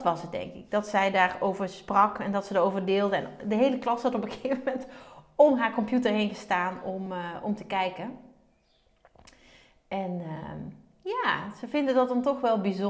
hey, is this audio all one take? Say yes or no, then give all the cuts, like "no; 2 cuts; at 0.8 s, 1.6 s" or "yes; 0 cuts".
yes; 0 cuts